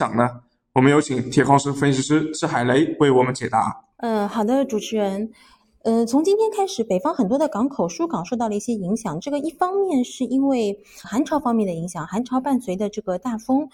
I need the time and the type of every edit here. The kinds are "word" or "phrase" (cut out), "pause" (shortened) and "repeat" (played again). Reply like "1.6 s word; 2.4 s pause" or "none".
3.9 s pause; 11.0 s word